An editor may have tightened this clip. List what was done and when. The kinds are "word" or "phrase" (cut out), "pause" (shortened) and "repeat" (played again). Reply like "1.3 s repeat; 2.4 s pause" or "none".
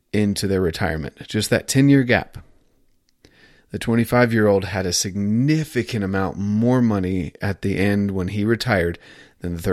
none